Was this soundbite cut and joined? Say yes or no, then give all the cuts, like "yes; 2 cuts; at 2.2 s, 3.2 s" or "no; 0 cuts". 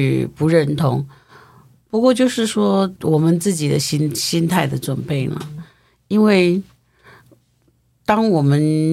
yes; 1 cut; at 3.0 s